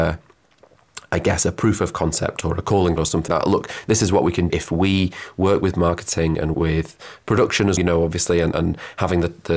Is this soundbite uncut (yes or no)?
no